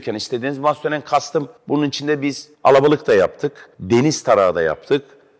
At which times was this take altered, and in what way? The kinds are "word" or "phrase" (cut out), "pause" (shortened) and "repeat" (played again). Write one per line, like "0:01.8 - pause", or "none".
0:01.6 - pause
0:02.5 - pause
0:03.7 - pause